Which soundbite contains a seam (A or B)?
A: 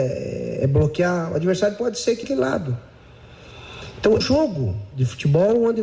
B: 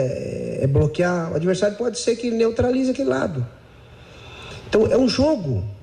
A